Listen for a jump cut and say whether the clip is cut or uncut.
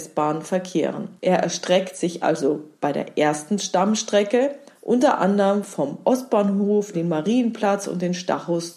cut